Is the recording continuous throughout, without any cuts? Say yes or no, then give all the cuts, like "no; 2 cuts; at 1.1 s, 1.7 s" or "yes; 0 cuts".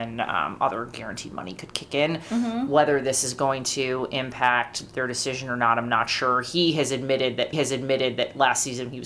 no; 1 cut; at 7.5 s